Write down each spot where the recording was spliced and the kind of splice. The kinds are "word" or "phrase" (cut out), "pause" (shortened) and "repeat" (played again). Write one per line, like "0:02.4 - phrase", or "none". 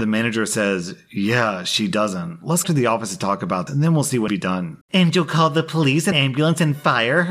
0:02.6 - phrase
0:03.7 - word
0:04.3 - phrase
0:04.8 - pause
0:06.1 - word

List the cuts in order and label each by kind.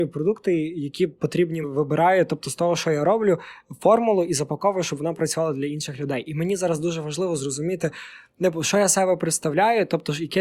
0:01.6 - phrase

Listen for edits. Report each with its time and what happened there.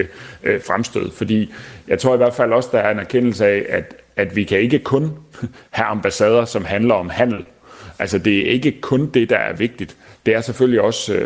none

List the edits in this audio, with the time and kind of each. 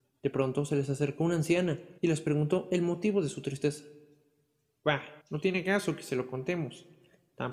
0:02.0 - pause
0:05.2 - pause

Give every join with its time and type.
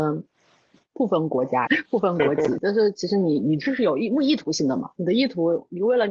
0:01.7 - phrase
0:02.6 - word

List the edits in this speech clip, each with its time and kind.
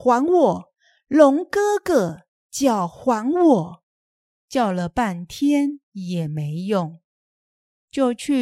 none

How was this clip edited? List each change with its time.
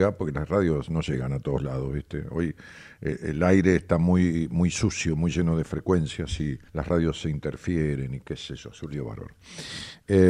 0:06.7 - pause

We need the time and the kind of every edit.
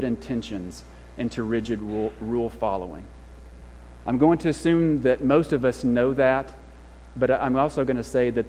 none

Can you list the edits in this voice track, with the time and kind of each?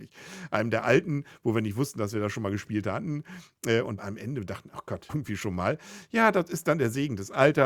0:04.0 - phrase
0:05.1 - phrase

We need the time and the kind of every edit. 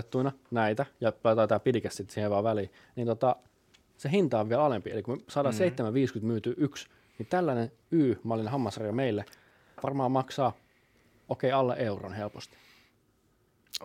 none

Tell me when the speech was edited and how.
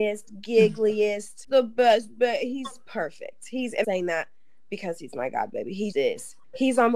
0:01.5 - word
0:03.8 - phrase
0:05.9 - word

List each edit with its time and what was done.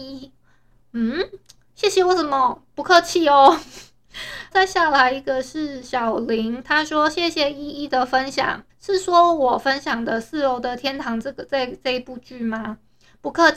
0:04.5 - word
0:08.7 - pause

